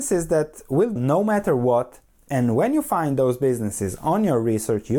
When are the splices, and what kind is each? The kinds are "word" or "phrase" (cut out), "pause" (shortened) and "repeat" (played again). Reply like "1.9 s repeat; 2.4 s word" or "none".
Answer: 1.0 s word